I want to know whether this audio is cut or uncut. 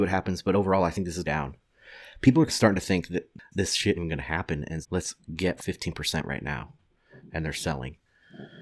cut